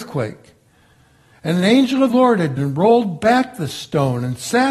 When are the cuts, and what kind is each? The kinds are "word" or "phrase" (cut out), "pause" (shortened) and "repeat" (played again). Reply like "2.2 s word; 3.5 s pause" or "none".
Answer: 2.1 s word; 2.6 s word